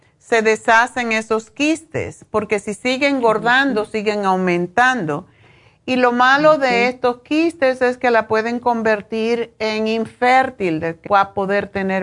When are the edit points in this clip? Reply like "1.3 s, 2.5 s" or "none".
11.1 s